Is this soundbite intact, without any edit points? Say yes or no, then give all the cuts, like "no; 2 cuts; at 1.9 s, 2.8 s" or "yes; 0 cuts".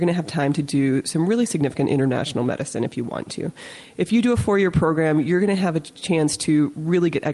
yes; 0 cuts